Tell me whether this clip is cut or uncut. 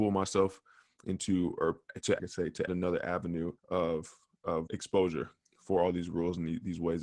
cut